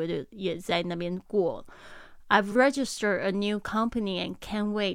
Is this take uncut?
yes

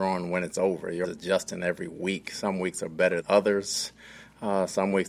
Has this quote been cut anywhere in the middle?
yes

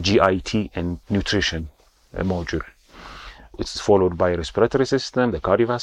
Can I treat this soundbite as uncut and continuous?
yes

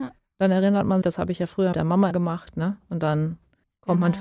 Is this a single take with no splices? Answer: no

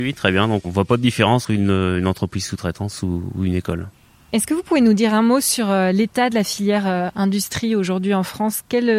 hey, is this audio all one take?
no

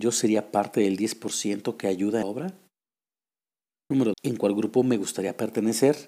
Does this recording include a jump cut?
yes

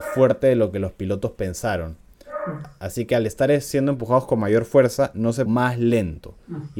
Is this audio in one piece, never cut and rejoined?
no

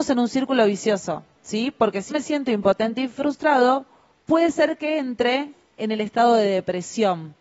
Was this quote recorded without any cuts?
no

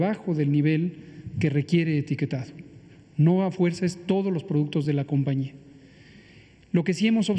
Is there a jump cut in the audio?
no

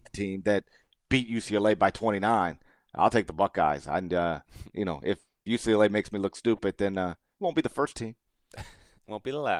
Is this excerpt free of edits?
yes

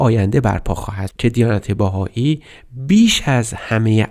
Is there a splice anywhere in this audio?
yes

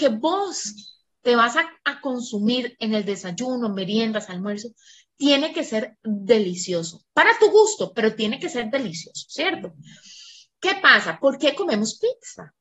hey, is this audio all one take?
yes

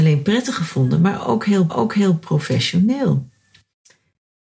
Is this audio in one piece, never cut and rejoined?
no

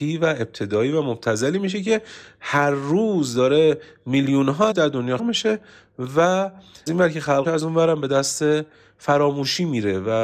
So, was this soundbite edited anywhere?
yes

